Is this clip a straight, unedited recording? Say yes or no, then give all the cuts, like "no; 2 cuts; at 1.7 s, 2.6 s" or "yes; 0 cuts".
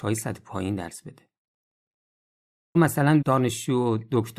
no; 2 cuts; at 2.8 s, 3.2 s